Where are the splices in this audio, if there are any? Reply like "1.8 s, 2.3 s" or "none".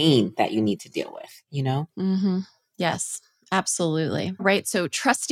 4.4 s